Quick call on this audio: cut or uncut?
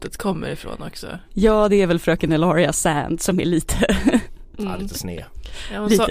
uncut